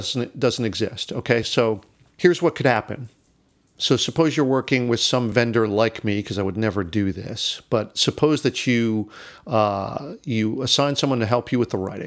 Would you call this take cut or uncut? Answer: uncut